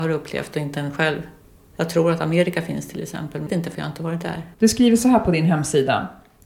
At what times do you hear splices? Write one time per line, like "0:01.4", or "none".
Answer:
0:01.4
0:03.5
0:04.5

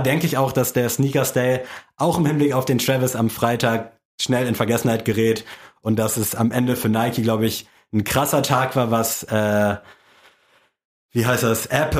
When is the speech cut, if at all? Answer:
none

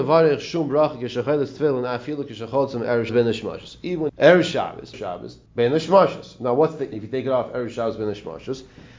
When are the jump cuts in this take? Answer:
0:03.1
0:04.1
0:04.9
0:05.5
0:06.9

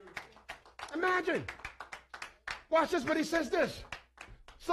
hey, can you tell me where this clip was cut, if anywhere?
none

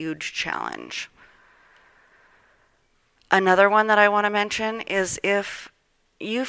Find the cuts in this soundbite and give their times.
none

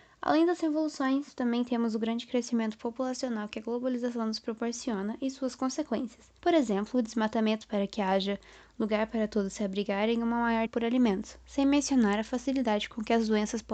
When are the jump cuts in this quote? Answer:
0:06.4
0:10.7

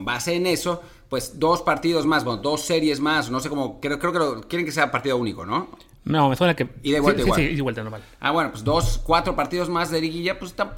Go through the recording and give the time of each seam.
none

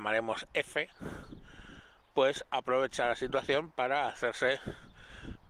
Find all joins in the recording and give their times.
none

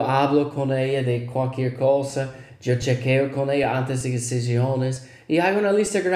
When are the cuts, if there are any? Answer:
none

